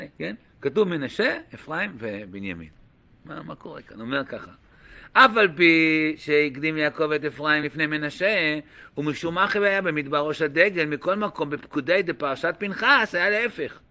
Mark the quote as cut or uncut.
uncut